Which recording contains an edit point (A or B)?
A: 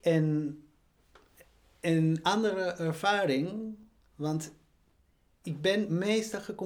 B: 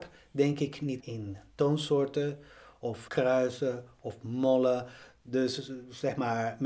B